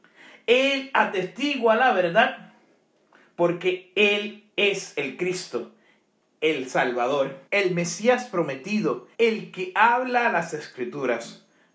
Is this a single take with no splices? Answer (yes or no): no